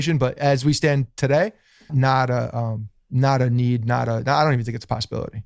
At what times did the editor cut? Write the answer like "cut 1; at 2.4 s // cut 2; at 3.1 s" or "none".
cut 1; at 1.9 s